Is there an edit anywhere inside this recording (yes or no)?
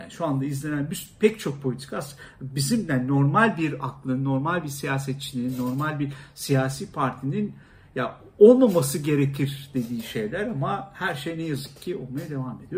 no